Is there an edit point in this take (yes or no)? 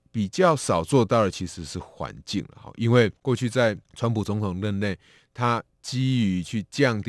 yes